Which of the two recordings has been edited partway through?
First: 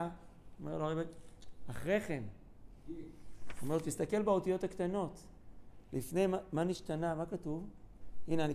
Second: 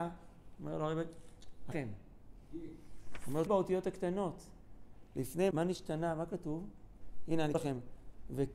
second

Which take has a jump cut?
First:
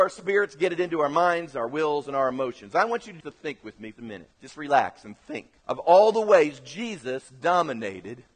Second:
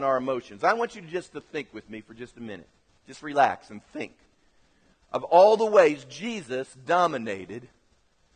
first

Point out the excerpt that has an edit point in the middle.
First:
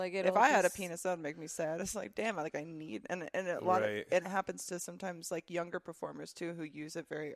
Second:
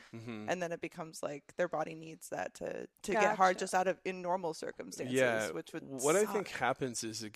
second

